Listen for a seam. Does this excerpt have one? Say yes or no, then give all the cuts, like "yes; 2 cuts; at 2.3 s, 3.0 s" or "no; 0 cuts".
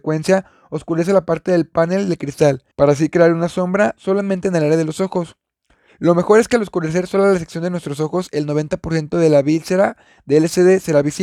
yes; 1 cut; at 2.7 s